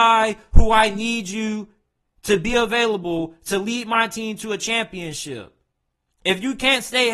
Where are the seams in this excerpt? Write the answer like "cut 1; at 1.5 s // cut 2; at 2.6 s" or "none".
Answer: none